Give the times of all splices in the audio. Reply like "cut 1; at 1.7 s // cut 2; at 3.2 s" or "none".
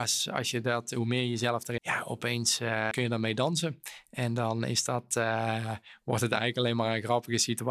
cut 1; at 1.8 s // cut 2; at 2.9 s